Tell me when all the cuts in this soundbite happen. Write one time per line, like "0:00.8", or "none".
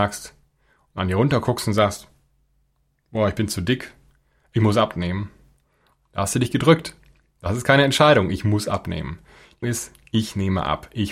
0:09.6